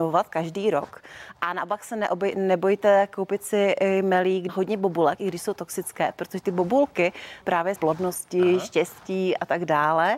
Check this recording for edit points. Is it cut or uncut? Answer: cut